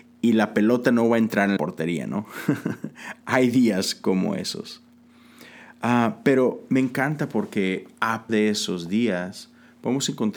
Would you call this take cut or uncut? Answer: cut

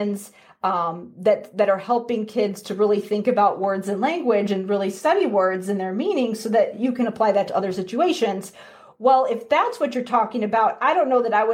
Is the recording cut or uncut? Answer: uncut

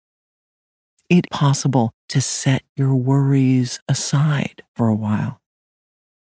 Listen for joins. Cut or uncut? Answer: cut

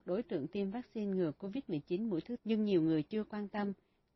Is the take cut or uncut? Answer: cut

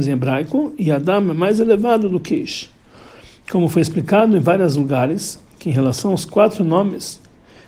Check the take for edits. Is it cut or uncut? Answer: uncut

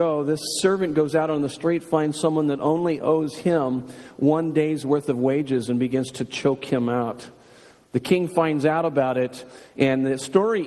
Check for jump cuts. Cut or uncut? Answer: uncut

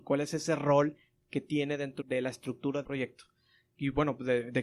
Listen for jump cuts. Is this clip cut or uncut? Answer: cut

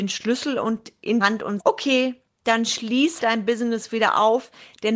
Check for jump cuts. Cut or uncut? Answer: cut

